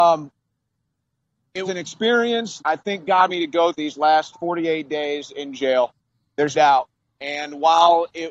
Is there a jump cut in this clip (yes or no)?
yes